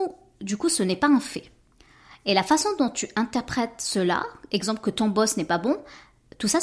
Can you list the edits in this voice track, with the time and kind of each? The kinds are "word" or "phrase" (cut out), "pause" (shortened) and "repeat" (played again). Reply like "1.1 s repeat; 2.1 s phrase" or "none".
none